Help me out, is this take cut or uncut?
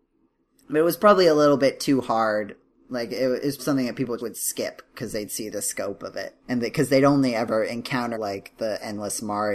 cut